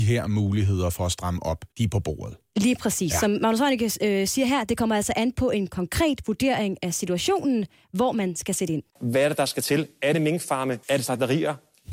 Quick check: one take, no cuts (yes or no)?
no